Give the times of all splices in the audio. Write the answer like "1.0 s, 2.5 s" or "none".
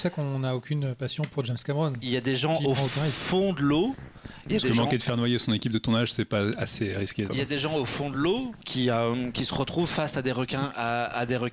7.3 s